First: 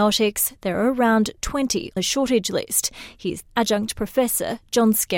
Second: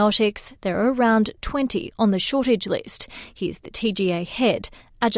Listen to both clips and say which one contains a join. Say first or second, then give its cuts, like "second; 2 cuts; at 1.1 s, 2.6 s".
first; 2 cuts; at 2.0 s, 3.5 s